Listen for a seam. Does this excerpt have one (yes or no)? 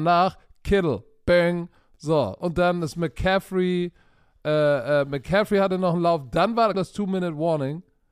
yes